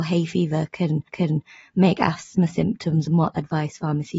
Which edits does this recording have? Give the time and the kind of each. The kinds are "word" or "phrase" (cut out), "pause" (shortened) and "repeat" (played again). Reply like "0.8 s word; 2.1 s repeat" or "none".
1.1 s repeat; 3.0 s word